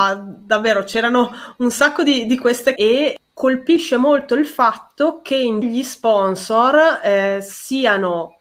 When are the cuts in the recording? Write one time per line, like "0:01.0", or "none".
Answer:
0:02.8
0:05.6

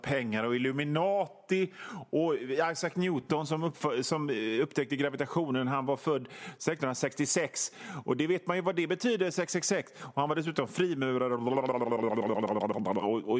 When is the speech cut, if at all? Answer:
none

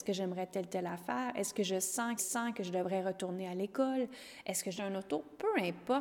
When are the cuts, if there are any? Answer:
0:02.2
0:04.8

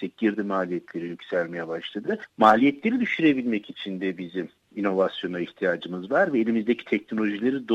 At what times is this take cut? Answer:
none

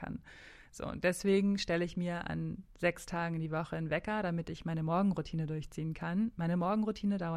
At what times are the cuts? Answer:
none

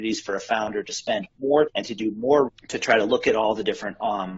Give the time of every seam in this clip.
0:01.7
0:02.5

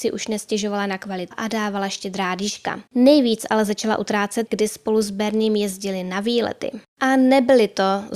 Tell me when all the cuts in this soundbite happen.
0:01.3
0:02.9
0:04.5

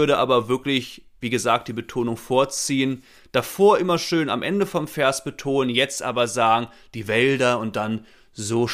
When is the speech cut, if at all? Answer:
none

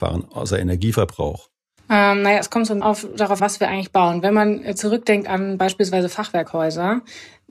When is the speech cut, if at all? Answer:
0:01.8
0:02.8
0:03.4

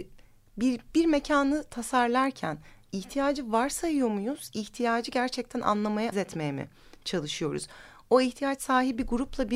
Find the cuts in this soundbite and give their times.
0:06.1

